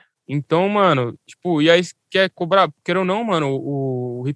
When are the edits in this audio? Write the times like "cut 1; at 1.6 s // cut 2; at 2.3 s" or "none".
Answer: none